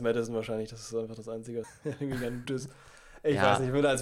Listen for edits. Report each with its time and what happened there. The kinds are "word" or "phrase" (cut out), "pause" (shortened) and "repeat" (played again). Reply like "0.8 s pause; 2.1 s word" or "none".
1.6 s phrase; 2.4 s phrase

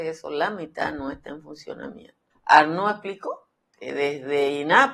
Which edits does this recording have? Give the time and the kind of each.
2.3 s pause

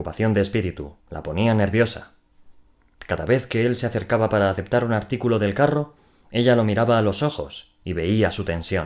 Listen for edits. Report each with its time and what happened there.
1.0 s pause

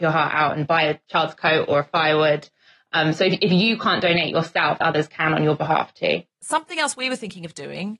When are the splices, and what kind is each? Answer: 4.8 s word

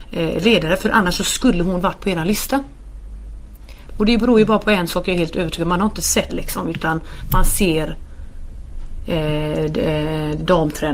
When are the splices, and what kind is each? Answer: 6.3 s phrase

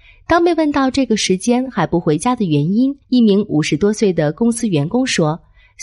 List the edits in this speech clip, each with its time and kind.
3.0 s pause

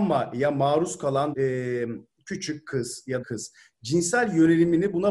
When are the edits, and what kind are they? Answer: 1.3 s word; 3.2 s phrase

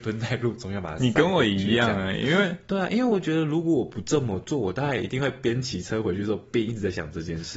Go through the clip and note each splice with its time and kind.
none

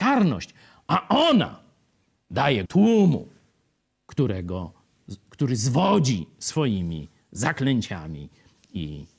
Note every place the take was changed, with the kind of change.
2.7 s word

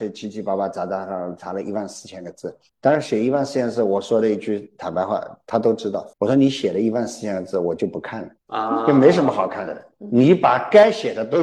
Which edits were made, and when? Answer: 2.7 s pause; 6.1 s pause; 8.4 s pause

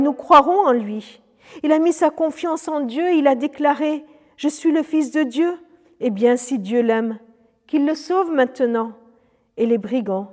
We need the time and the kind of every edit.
none

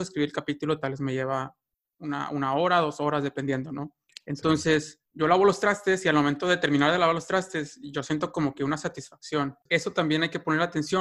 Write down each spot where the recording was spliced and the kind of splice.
none

